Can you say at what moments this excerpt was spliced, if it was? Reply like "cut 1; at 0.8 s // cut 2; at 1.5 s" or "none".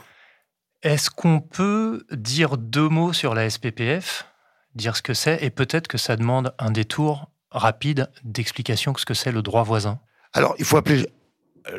none